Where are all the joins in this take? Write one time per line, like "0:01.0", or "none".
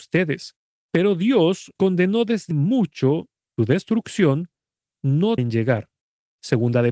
0:01.8
0:02.5
0:03.6
0:05.4